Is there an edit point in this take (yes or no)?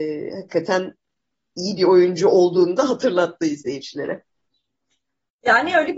no